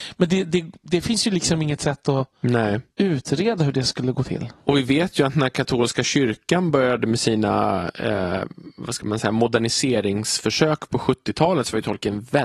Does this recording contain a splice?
no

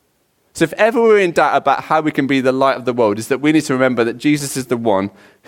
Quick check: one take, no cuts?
yes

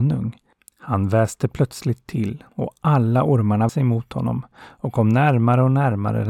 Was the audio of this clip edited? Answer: yes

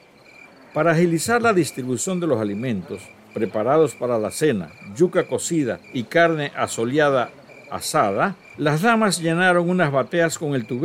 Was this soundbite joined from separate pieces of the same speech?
yes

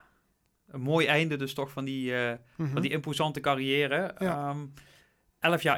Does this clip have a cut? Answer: no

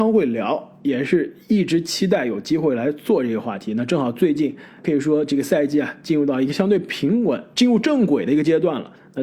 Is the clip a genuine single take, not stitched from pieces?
no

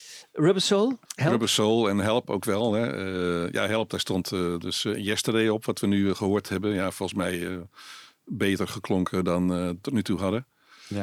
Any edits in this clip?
yes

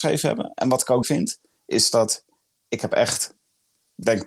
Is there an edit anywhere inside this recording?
yes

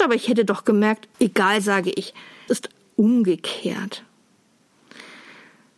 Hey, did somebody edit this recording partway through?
yes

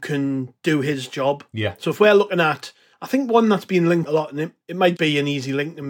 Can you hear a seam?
yes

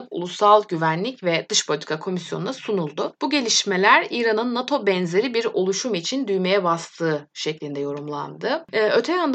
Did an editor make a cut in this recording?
no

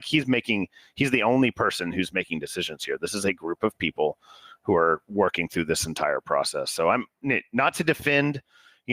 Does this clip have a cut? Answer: no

